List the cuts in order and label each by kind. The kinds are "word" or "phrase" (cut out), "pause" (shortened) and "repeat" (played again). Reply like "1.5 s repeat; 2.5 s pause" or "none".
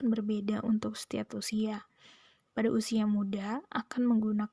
1.3 s word

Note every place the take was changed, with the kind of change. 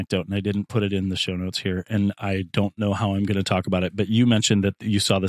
none

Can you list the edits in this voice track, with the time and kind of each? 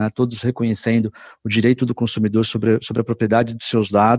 none

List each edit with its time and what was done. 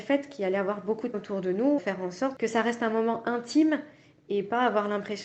1.1 s word; 1.8 s word

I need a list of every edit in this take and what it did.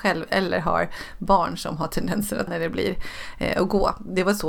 2.5 s word

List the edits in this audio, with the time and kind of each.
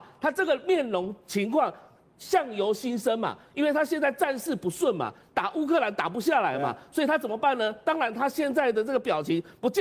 none

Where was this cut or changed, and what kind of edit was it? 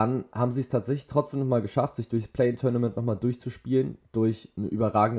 none

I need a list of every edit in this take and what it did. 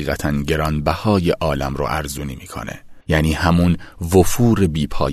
3.0 s pause

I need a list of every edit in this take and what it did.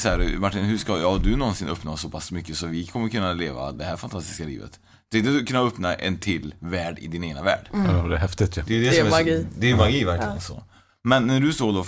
none

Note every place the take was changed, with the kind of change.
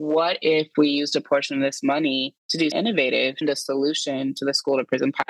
2.4 s pause; 2.7 s word; 3.4 s phrase

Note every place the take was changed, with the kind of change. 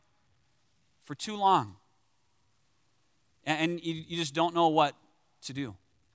none

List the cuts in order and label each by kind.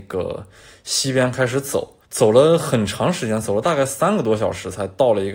2.0 s pause

